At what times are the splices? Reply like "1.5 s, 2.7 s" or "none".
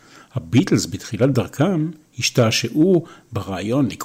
none